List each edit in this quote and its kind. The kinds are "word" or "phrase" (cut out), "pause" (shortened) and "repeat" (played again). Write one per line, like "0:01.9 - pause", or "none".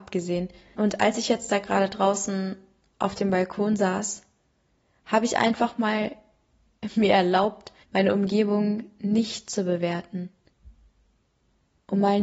none